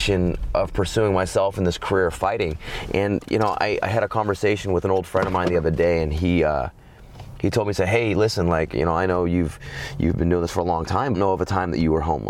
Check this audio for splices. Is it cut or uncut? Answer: cut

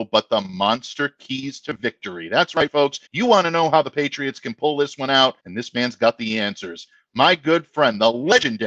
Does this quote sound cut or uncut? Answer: cut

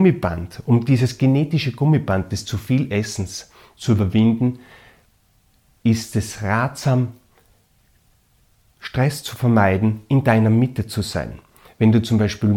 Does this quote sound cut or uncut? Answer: uncut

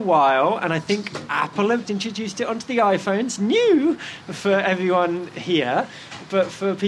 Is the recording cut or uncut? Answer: cut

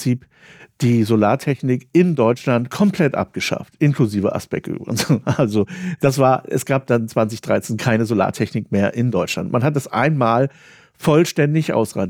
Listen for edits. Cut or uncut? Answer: uncut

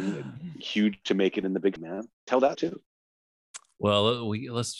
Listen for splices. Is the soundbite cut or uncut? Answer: cut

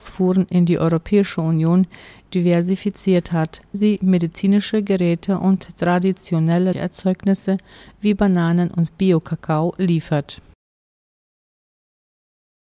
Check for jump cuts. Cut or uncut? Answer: cut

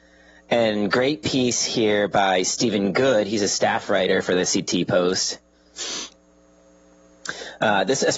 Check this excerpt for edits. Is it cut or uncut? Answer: uncut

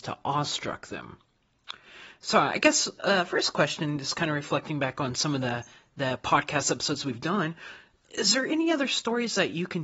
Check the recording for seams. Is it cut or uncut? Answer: uncut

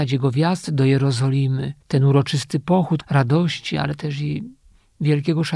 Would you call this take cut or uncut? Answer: cut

